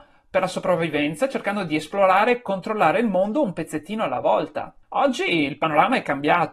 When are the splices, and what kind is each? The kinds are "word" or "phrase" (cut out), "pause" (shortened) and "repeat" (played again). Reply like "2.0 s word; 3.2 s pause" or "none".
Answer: 4.8 s pause